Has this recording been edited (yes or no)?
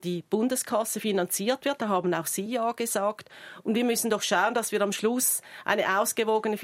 no